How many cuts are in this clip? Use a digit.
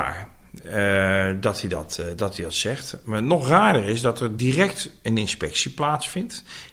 0